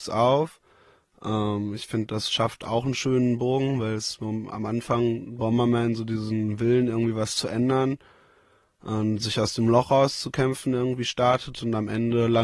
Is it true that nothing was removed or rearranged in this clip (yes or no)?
yes